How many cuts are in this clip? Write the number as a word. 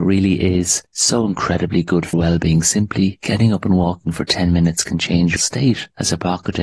two